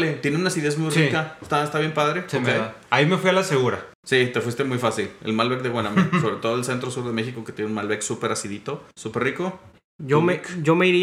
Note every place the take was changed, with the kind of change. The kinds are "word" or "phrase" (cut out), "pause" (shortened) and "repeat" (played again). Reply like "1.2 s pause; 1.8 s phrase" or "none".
3.9 s pause; 8.9 s pause; 9.7 s pause